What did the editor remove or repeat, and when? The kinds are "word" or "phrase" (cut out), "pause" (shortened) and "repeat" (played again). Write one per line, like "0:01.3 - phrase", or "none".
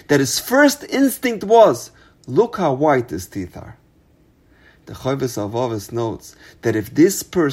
none